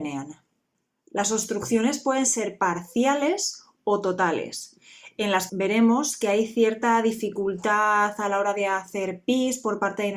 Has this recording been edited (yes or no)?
yes